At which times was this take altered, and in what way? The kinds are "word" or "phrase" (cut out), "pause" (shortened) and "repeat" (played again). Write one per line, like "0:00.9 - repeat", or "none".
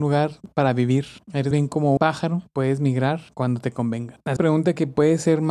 0:01.5 - word
0:02.0 - word
0:04.4 - word